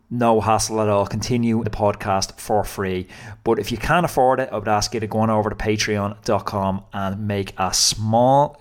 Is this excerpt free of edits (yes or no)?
no